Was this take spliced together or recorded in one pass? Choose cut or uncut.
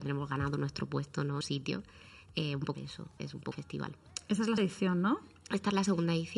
cut